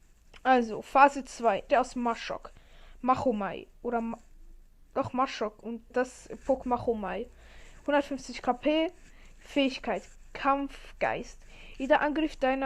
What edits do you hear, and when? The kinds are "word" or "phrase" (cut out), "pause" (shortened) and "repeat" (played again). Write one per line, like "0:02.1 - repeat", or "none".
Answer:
0:01.7 - word
0:05.9 - word
0:06.6 - word